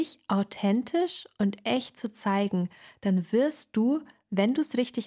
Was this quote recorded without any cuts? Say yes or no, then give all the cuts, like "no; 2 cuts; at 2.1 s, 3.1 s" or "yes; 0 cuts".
yes; 0 cuts